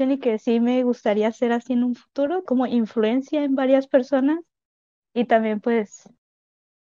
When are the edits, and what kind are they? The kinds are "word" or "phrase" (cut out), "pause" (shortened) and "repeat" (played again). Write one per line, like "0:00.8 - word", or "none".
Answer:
0:02.5 - word